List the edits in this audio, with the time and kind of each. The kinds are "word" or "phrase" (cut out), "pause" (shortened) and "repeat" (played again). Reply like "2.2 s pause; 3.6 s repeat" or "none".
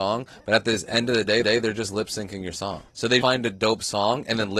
1.4 s repeat; 2.9 s pause; 3.2 s word

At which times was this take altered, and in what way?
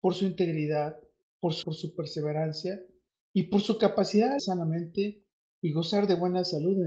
1.6 s word; 4.4 s word

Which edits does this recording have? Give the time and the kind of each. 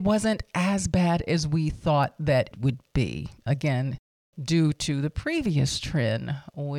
2.5 s word

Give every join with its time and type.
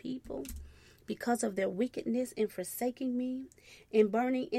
none

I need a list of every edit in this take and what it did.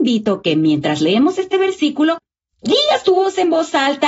none

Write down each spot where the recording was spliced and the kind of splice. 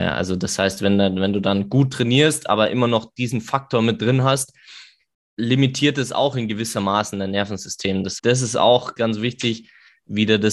8.2 s word; 9.0 s word

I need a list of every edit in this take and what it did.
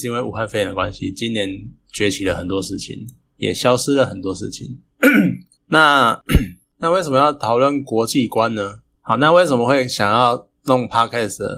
none

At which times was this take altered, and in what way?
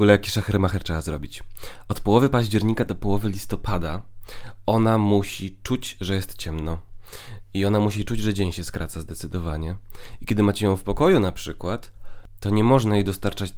none

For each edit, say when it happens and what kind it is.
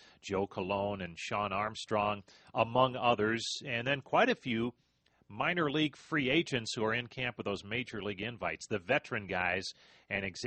none

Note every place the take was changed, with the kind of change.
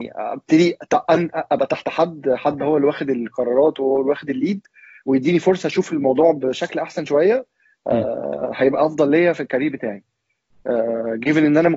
none

